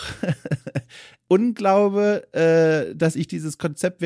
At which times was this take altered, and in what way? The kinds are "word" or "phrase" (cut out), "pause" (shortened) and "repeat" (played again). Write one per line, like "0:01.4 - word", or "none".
none